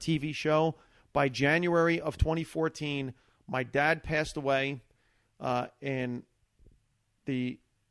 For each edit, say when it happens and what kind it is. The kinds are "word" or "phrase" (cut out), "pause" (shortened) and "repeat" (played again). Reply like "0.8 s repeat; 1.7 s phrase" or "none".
none